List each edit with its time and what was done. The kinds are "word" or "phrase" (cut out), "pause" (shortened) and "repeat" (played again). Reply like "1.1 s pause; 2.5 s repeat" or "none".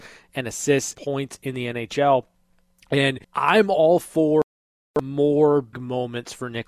0.9 s word; 3.2 s pause; 5.7 s word